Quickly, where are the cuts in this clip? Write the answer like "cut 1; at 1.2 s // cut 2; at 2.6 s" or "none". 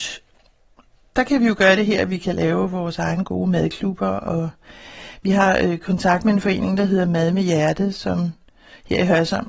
none